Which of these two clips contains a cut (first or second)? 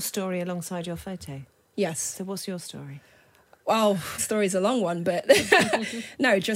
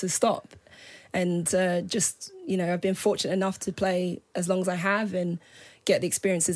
first